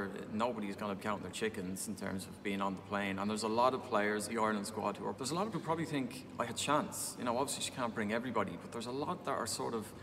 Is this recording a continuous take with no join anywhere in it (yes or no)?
no